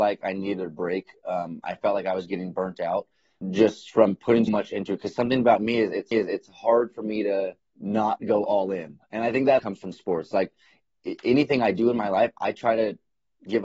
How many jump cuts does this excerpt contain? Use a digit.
5